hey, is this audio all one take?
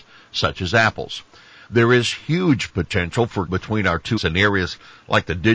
no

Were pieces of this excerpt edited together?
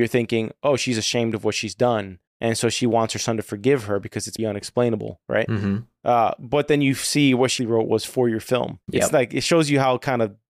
yes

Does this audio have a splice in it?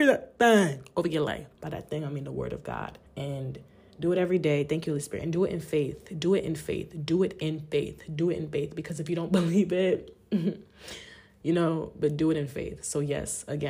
yes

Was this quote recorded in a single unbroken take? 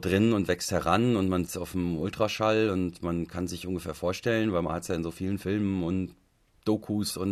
no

